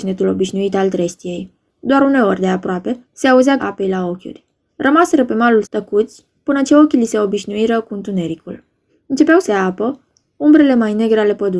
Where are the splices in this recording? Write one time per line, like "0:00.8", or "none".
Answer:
0:01.7
0:03.0
0:03.6
0:04.7
0:05.6
0:08.9
0:09.4